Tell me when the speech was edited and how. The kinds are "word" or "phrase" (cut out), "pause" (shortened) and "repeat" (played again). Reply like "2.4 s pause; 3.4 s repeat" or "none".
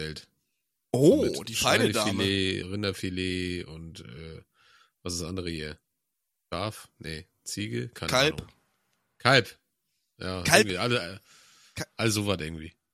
2.6 s word